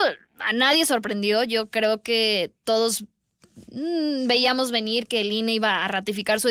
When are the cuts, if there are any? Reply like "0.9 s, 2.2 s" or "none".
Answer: none